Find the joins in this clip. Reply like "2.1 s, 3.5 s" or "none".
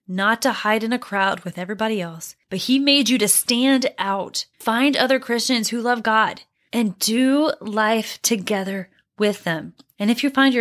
2.4 s, 4.5 s